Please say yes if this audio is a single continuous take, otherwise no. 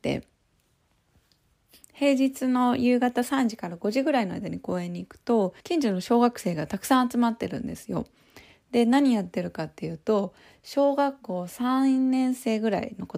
no